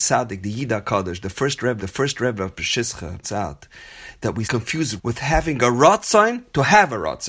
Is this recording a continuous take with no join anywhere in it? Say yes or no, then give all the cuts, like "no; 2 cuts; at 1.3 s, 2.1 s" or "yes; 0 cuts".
no; 4 cuts; at 1.8 s, 3.2 s, 4.4 s, 5.0 s